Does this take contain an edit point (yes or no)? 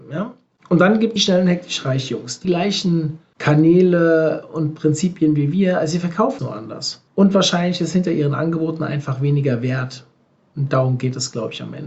yes